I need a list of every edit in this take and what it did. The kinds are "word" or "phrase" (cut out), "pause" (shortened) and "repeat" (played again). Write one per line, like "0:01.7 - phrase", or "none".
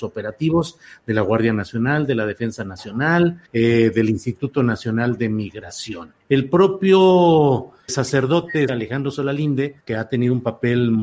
0:03.5 - pause
0:06.2 - pause
0:07.9 - word
0:08.7 - word
0:09.8 - pause

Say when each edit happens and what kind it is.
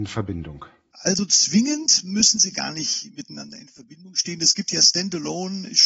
none

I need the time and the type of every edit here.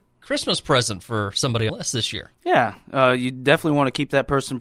0:01.7 - phrase

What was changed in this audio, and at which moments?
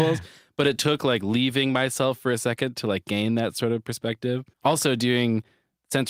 0:04.5 - pause

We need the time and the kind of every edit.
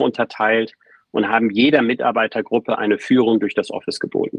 none

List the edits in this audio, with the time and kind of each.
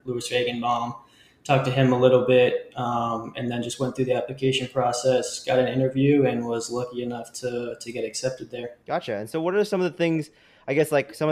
0:08.8 - pause

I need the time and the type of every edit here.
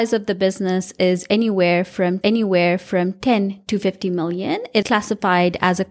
0:02.2 - repeat
0:04.8 - word

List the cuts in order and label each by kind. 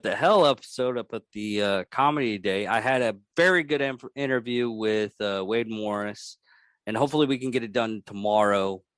none

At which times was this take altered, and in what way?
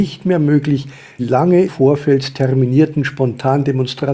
0:01.2 - word
0:01.7 - word

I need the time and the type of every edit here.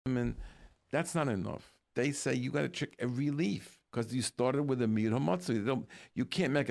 0:01.9 - pause
0:03.9 - pause

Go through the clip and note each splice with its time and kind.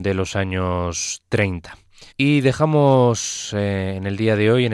0:02.1 - pause

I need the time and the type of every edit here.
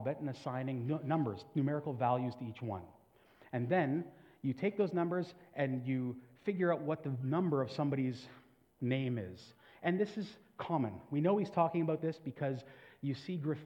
none

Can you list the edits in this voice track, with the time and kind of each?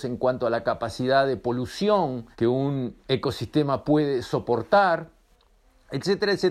0:02.3 - pause

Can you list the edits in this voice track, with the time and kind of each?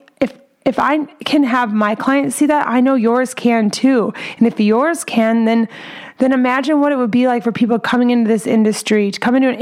none

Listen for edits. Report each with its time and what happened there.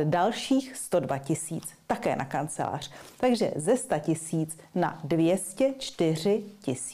none

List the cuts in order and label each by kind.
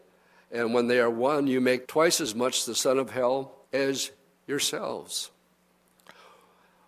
0:01.8 - word
0:03.6 - pause

